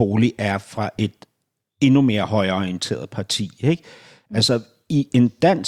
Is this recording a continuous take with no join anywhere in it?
yes; 0 cuts

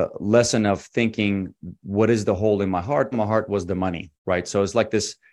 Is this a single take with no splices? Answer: no; 2 cuts; at 3.1 s, 4.2 s

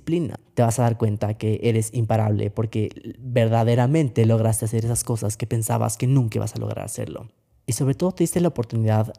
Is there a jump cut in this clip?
no; 0 cuts

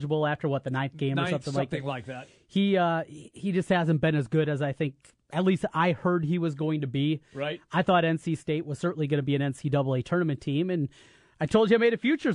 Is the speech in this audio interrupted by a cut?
no; 0 cuts

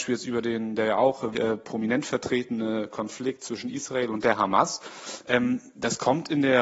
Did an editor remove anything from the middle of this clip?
yes; 1 cut; at 1.3 s

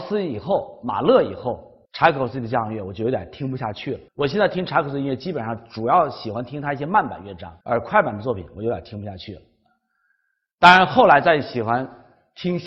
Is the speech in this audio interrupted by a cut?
yes; 3 cuts; at 1.9 s, 4.1 s, 7.6 s

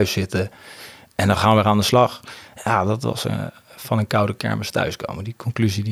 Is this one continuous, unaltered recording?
yes; 0 cuts

